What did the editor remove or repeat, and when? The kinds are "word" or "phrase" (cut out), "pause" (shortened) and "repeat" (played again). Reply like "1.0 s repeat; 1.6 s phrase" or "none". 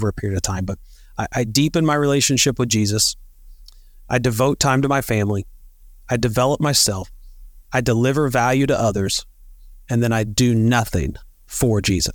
none